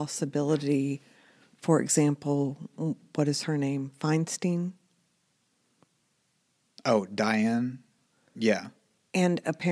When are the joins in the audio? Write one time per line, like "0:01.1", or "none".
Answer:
none